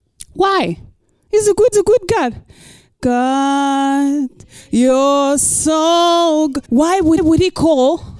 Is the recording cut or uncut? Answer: cut